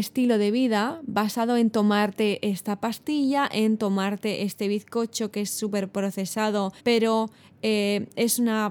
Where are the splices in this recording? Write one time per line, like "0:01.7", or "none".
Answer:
0:06.8